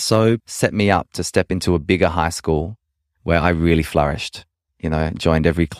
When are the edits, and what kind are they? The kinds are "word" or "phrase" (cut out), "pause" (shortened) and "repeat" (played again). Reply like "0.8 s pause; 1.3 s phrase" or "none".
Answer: none